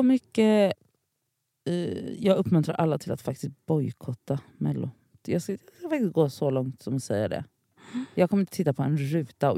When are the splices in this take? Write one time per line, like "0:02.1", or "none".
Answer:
none